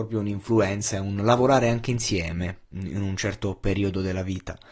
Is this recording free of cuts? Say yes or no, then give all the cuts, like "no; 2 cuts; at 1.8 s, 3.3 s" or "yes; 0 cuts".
no; 1 cut; at 2.6 s